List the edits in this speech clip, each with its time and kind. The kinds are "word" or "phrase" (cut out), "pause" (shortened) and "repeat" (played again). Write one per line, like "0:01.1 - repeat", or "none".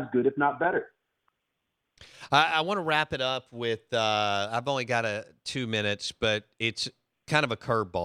none

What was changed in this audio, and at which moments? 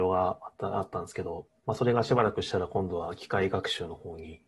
0:01.6 - pause

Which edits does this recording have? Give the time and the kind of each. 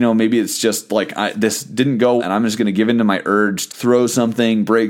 0:02.2 - word
0:03.7 - word

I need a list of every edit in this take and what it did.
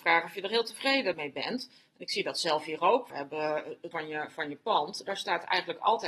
0:01.1 - word
0:03.1 - word
0:03.9 - word

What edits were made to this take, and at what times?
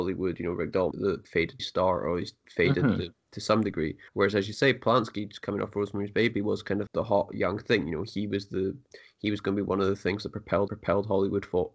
0:00.9 - word
0:01.6 - word
0:04.1 - pause
0:06.9 - word
0:10.7 - repeat

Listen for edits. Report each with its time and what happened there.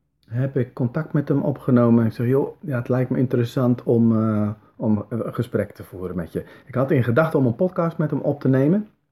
none

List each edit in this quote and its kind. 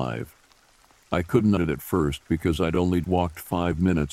0:01.6 - word
0:03.0 - word

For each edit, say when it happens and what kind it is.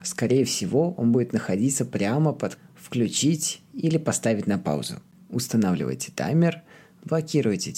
0:02.6 - word

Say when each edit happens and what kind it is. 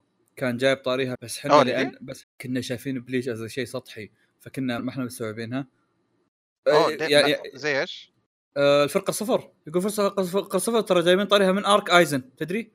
0:01.1 - phrase
0:02.2 - phrase
0:04.8 - word
0:09.6 - pause

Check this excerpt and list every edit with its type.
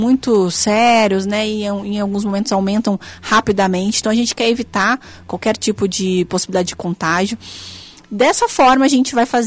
none

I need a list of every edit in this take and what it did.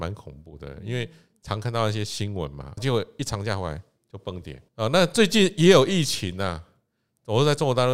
0:02.8 - word
0:04.7 - pause

